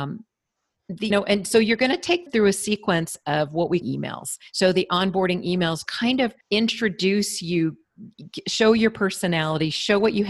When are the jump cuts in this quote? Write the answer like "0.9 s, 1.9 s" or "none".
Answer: 1.1 s, 2.3 s, 3.8 s, 4.5 s, 5.9 s, 6.4 s